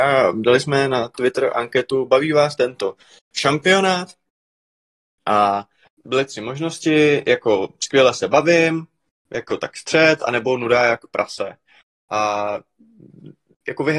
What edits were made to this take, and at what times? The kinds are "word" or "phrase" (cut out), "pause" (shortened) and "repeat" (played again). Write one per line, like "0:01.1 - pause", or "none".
none